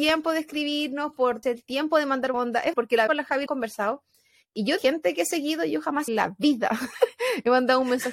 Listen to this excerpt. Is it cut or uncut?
cut